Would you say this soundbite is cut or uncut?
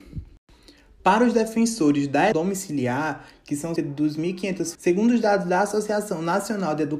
cut